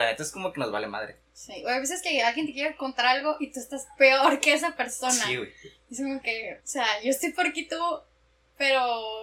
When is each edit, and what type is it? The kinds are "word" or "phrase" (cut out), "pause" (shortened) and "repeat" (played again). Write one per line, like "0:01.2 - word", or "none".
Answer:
0:06.6 - word